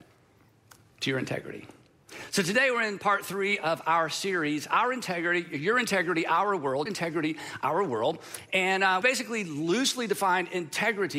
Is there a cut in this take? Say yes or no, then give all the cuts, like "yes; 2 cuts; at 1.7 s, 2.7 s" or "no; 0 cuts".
yes; 2 cuts; at 6.9 s, 9.0 s